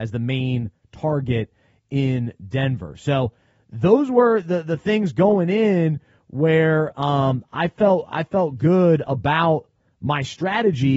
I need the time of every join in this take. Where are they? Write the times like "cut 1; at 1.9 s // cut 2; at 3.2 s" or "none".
none